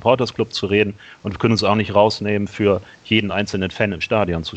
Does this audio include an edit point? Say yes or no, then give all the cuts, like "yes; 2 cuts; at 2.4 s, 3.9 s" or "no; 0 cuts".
no; 0 cuts